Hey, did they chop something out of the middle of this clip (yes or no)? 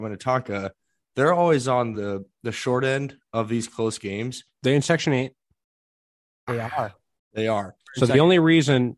no